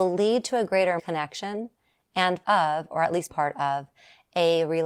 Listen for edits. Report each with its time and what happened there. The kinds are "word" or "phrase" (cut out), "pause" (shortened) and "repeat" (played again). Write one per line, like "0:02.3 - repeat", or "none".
0:01.0 - word
0:02.4 - word
0:03.3 - word